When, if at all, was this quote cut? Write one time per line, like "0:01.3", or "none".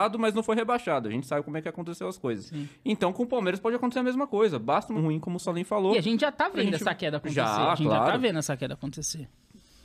0:05.0